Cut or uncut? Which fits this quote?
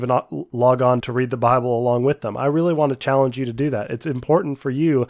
cut